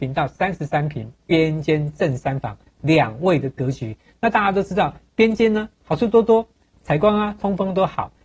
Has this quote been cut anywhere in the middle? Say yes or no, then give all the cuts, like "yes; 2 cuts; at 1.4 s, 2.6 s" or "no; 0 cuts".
no; 0 cuts